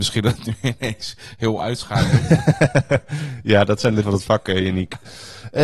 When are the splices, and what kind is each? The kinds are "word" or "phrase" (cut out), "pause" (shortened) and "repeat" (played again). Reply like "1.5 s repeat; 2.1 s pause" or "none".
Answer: 1.6 s word; 4.0 s word